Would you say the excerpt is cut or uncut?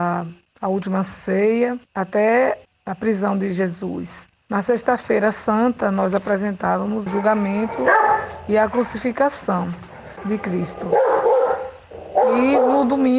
cut